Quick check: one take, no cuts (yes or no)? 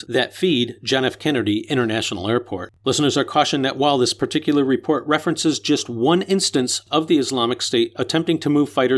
no